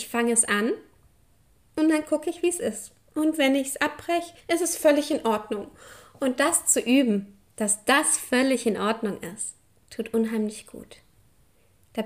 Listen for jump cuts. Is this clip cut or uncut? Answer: cut